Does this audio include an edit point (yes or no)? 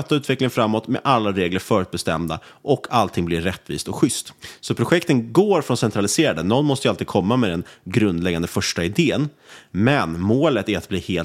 no